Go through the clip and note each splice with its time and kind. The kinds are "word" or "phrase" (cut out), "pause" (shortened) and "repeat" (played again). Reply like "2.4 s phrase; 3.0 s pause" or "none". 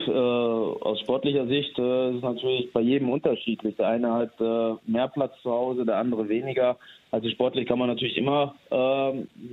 none